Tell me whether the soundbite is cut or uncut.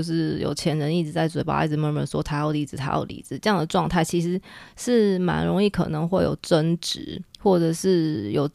cut